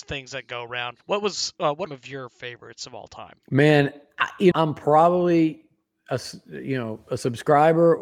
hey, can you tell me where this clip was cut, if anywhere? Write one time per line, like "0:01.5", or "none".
0:01.0
0:01.9
0:03.4
0:04.5